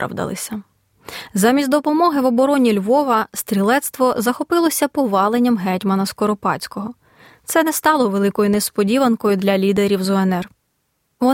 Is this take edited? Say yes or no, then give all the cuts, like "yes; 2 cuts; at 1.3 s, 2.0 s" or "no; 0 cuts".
no; 0 cuts